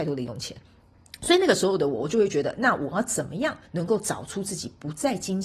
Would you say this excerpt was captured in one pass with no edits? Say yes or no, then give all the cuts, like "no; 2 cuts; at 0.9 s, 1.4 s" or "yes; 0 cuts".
no; 1 cut; at 3.6 s